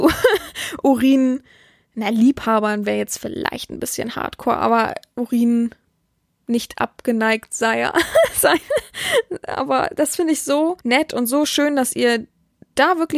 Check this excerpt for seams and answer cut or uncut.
cut